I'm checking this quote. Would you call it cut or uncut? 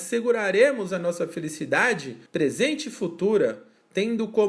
cut